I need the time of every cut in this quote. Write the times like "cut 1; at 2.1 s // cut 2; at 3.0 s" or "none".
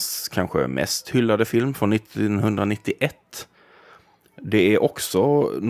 none